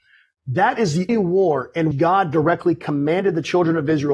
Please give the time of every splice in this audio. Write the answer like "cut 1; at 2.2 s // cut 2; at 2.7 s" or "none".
cut 1; at 1.1 s // cut 2; at 1.9 s